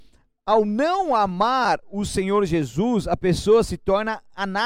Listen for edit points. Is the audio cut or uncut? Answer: uncut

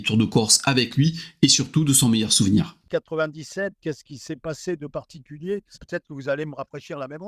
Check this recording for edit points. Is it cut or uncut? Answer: cut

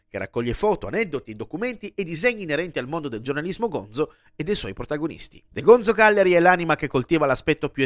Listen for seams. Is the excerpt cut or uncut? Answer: cut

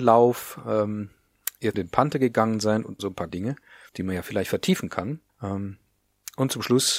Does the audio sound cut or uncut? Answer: cut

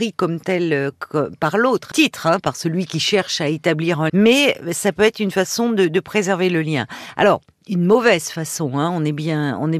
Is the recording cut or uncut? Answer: cut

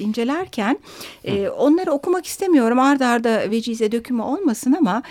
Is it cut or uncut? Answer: uncut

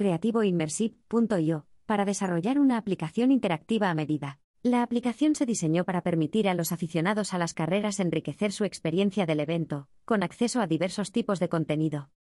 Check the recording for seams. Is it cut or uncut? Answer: cut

